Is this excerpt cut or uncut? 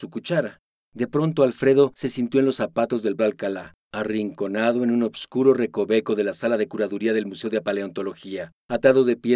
cut